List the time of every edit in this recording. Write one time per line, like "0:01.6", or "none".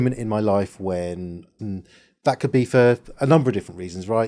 0:01.6